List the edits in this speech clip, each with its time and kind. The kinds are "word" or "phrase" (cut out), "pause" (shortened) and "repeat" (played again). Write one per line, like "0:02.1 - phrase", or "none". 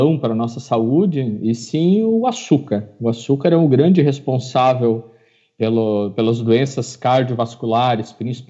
none